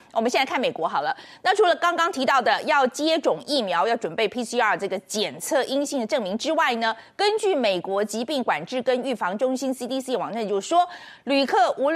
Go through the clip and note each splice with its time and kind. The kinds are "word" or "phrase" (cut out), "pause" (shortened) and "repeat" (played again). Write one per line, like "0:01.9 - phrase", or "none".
none